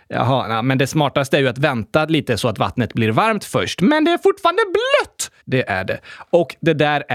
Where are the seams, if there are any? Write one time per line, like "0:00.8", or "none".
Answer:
0:05.4